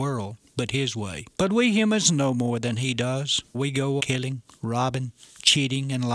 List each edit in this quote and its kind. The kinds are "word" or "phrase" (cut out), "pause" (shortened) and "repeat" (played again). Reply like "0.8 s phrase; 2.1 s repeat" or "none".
1.3 s pause; 3.5 s word; 4.0 s word

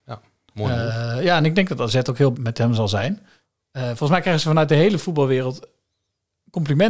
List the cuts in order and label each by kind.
2.3 s word

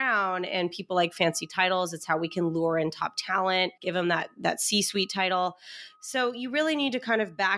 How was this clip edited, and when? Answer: 3.8 s pause

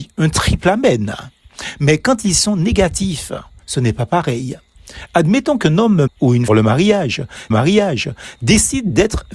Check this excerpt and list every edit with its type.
6.1 s word; 6.5 s phrase; 7.5 s repeat

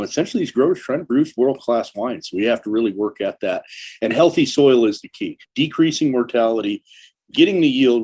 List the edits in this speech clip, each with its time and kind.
5.4 s pause

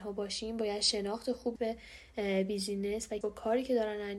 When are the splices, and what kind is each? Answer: 1.6 s word; 3.2 s word

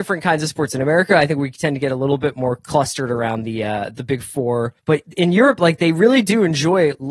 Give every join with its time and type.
4.8 s pause

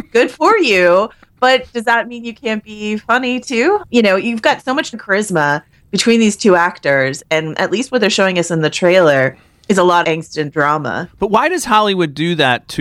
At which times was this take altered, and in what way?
4.9 s word; 10.0 s word

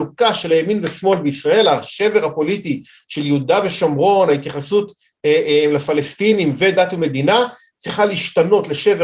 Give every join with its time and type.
none

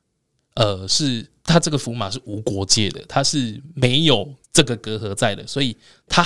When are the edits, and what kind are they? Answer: 4.4 s pause

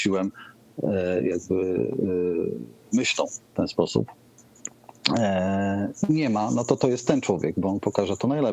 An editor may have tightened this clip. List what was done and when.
3.5 s pause

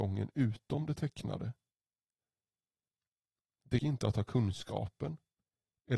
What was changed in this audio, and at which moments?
3.8 s word

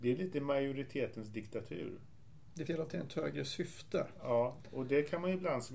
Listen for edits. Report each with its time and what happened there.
2.7 s word

